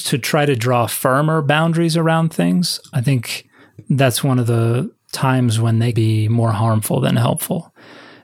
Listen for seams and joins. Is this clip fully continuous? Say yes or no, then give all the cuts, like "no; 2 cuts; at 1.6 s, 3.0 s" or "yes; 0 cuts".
no; 1 cut; at 5.9 s